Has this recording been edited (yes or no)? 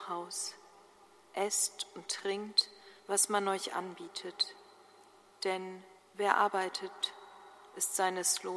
yes